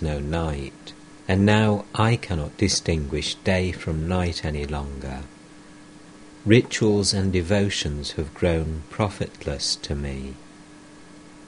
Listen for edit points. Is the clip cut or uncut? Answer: cut